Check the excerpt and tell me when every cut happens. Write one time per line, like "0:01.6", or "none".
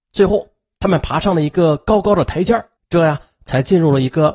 0:02.8